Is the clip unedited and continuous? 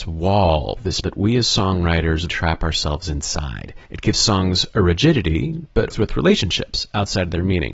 no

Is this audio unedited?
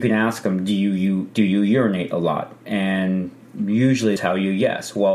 no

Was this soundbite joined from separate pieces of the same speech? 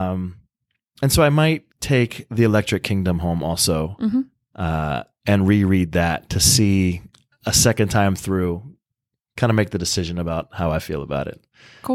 yes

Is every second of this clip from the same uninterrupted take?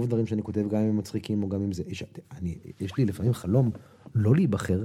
yes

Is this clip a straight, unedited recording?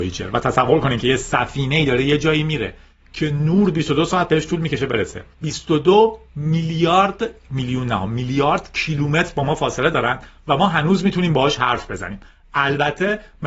no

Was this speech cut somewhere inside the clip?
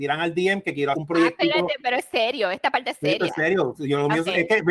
yes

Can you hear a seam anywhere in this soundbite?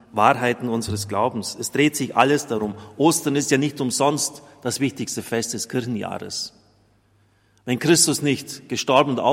no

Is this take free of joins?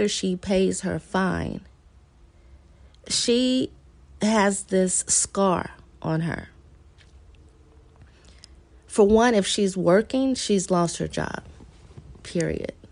yes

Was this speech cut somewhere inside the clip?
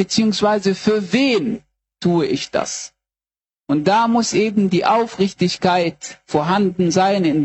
no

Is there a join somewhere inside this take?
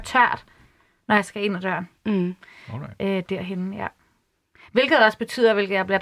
no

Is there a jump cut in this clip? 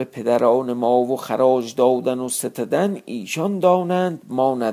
no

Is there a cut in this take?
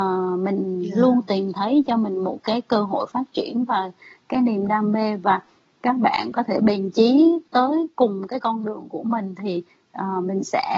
no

